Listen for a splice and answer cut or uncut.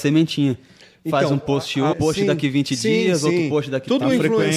cut